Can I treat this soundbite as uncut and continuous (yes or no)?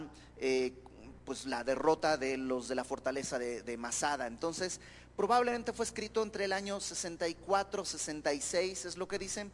yes